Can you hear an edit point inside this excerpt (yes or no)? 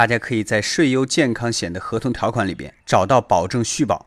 yes